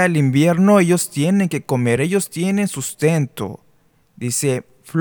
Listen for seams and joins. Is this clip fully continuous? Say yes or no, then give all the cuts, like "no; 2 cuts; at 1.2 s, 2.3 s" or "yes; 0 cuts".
yes; 0 cuts